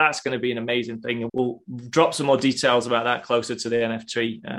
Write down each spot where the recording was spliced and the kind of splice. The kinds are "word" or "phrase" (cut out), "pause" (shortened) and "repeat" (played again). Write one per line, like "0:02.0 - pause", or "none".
0:01.3 - word